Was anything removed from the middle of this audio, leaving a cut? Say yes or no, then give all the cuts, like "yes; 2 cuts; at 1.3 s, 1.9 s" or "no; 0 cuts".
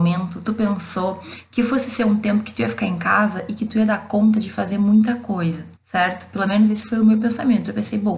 yes; 1 cut; at 5.8 s